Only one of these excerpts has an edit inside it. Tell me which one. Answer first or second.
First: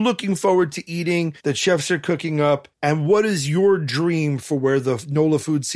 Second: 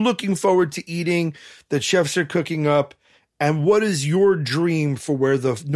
first